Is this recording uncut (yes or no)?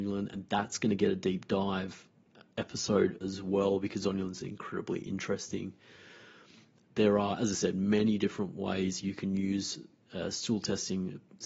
yes